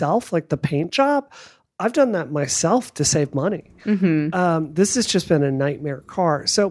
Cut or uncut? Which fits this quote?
uncut